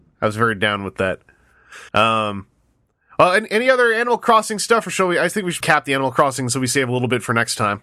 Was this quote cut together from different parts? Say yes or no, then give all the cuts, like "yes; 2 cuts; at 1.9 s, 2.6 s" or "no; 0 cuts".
yes; 2 cuts; at 1.9 s, 5.6 s